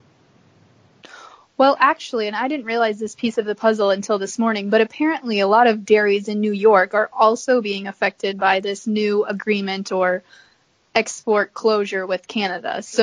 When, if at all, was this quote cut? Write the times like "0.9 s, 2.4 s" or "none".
none